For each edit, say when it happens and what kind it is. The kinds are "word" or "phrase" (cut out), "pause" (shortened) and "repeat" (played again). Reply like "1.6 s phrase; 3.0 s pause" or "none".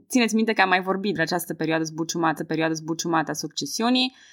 1.1 s word; 2.4 s repeat

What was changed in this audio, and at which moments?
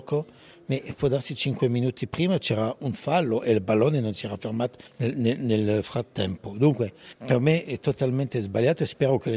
4.9 s pause; 7.7 s word

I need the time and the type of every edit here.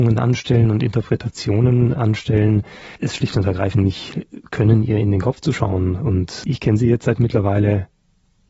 none

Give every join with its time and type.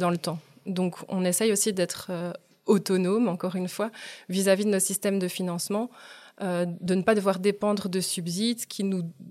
none

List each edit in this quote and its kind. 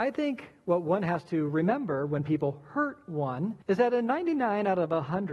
3.6 s pause

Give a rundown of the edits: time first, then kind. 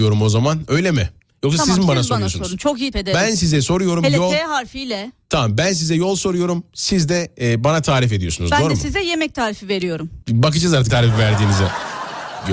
2.9 s word; 10.2 s pause; 10.9 s word

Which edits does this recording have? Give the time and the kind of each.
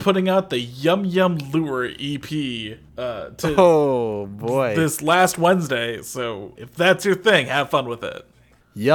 2.9 s pause; 6.5 s word

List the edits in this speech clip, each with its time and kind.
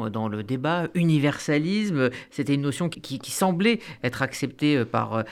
2.9 s word

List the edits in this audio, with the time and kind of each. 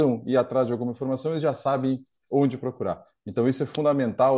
none

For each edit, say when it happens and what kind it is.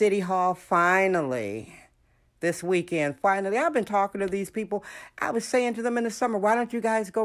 none

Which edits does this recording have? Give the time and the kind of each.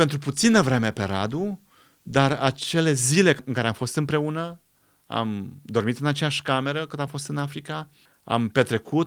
none

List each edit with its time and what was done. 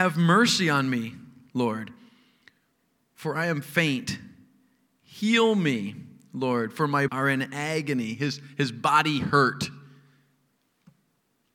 7.1 s word

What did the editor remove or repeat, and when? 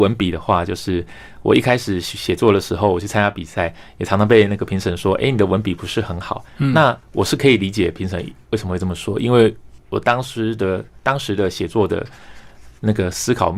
7.0 s pause

